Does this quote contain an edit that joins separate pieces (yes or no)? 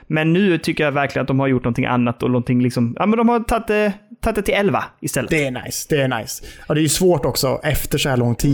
no